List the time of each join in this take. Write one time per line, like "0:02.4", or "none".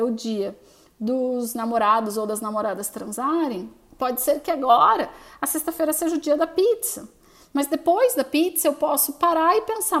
none